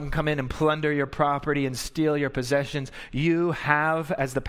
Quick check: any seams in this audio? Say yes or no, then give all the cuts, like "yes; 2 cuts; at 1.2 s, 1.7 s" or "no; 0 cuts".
no; 0 cuts